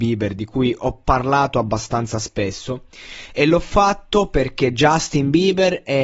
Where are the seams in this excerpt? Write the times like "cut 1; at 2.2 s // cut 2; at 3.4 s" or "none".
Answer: none

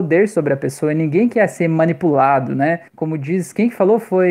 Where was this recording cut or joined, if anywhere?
cut 1; at 2.9 s

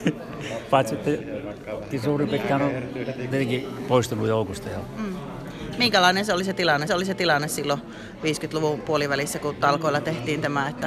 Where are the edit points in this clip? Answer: cut 1; at 1.9 s // cut 2; at 3.3 s // cut 3; at 6.9 s

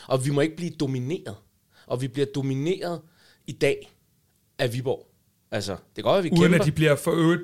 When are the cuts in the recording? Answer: none

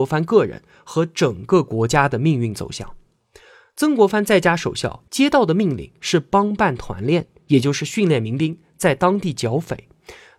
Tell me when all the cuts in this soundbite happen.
none

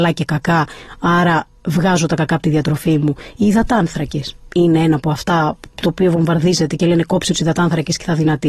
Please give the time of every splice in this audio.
none

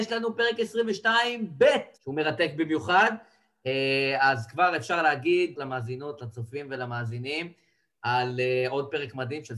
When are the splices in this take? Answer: cut 1; at 1.9 s // cut 2; at 5.5 s

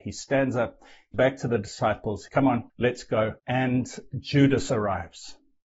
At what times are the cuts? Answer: cut 1; at 1.1 s // cut 2; at 2.3 s // cut 3; at 2.7 s // cut 4; at 3.4 s

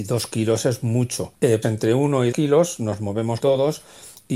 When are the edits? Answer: cut 1; at 1.6 s // cut 2; at 2.3 s // cut 3; at 3.4 s

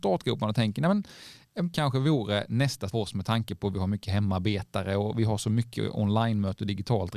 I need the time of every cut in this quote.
cut 1; at 1.7 s // cut 2; at 2.9 s

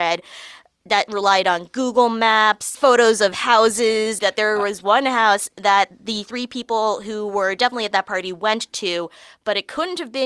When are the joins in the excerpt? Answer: cut 1; at 2.7 s // cut 2; at 4.2 s

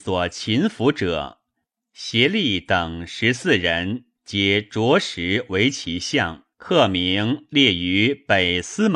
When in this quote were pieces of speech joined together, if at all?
cut 1; at 4.1 s // cut 2; at 6.5 s

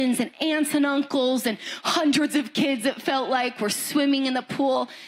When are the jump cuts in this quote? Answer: none

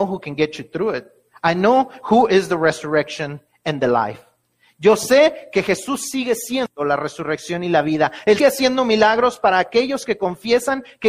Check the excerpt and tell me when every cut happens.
cut 1; at 8.4 s

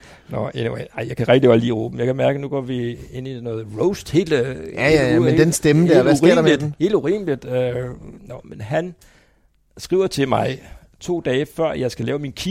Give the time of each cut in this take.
none

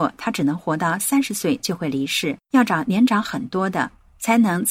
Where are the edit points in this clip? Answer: cut 1; at 2.4 s

